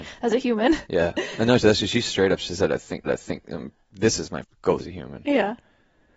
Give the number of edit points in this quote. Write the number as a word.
three